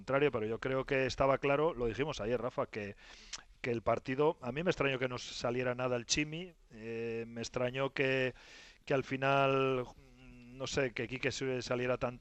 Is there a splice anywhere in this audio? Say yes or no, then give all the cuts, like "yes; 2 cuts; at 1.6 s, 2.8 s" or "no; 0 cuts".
no; 0 cuts